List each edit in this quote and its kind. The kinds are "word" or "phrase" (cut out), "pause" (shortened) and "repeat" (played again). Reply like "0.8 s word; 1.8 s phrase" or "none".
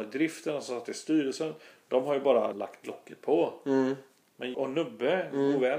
2.5 s word; 4.5 s word